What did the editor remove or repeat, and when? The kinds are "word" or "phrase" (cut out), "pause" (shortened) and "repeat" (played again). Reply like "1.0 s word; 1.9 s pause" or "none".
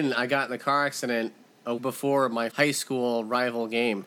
1.8 s word; 2.5 s word